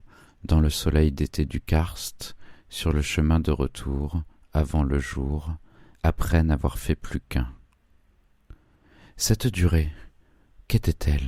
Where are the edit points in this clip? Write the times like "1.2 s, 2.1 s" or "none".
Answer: none